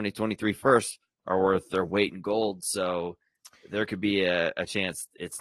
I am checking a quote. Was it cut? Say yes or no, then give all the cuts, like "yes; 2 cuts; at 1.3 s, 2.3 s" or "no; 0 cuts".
no; 0 cuts